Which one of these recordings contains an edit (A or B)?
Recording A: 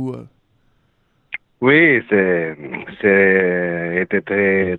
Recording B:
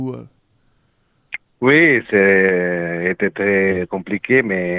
B